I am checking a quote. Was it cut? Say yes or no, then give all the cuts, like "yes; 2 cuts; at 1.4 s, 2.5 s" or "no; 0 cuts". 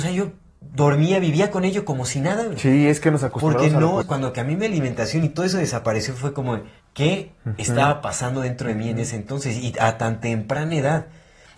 yes; 2 cuts; at 4.0 s, 6.8 s